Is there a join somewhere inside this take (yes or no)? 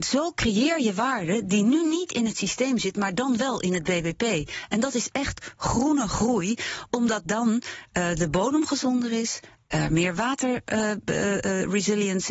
no